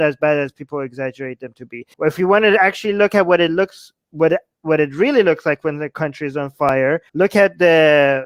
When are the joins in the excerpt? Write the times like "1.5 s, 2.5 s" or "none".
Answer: 1.9 s, 7.1 s